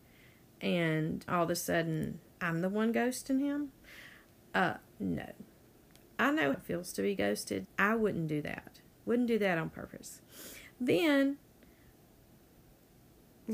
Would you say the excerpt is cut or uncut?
cut